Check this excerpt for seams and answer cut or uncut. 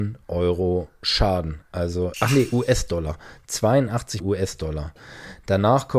cut